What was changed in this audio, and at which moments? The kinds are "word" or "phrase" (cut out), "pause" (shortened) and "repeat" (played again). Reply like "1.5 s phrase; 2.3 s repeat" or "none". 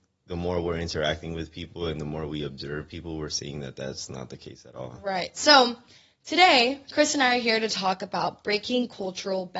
none